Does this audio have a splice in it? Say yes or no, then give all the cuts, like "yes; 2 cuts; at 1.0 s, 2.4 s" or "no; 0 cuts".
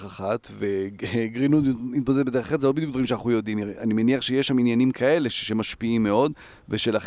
no; 0 cuts